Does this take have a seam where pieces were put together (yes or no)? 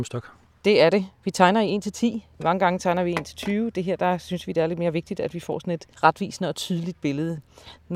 yes